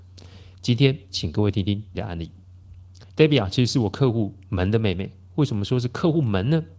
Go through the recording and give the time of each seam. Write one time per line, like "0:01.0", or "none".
0:01.9
0:03.1